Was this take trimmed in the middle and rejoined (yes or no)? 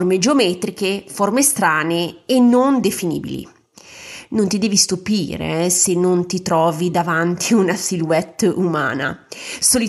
no